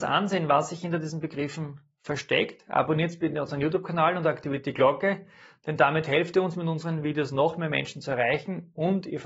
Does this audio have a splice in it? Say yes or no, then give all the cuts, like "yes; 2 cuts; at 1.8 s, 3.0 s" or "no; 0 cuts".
no; 0 cuts